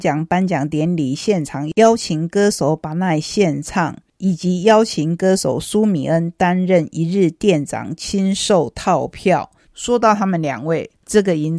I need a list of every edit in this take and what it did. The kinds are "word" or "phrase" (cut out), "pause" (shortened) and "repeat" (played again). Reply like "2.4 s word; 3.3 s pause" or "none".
none